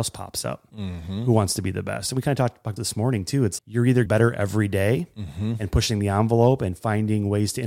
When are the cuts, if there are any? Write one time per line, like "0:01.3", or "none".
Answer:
0:02.8
0:03.6
0:04.1